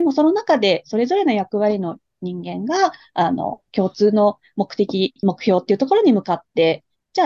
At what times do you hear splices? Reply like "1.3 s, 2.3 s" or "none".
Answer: 3.7 s